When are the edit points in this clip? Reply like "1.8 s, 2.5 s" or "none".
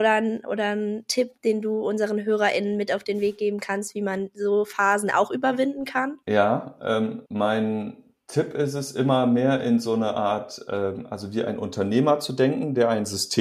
1.4 s, 6.2 s, 7.3 s